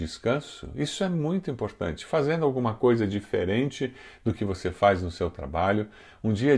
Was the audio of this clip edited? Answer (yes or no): no